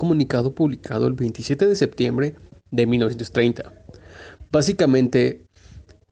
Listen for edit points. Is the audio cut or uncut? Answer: uncut